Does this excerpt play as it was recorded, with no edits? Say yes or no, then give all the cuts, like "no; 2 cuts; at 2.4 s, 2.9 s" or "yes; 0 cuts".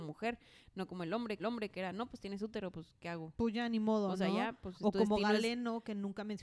no; 1 cut; at 1.4 s